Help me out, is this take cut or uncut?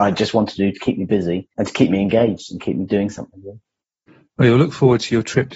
cut